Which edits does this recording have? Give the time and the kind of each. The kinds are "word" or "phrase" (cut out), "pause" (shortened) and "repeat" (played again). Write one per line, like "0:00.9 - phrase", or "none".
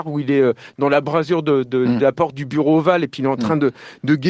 none